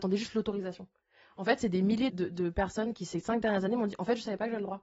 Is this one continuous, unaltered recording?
no; 1 cut; at 2.1 s

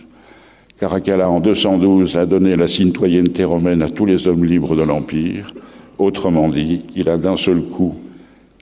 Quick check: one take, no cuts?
yes; 0 cuts

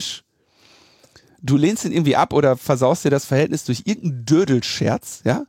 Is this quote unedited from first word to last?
yes; 0 cuts

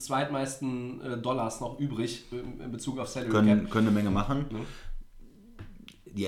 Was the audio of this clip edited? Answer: no; 0 cuts

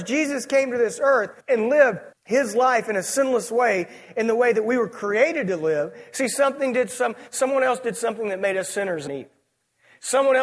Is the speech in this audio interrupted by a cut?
yes; 3 cuts; at 1.4 s, 2.1 s, 9.1 s

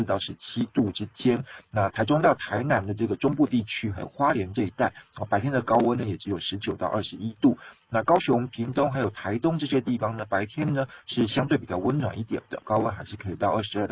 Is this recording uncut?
no; 1 cut; at 12.6 s

